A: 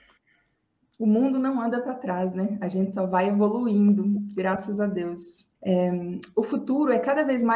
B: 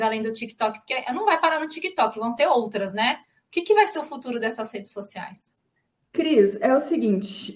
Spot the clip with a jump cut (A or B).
A